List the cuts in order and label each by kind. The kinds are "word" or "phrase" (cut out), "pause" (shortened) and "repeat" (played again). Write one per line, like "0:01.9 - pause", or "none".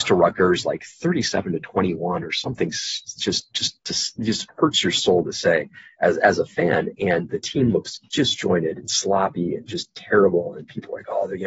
none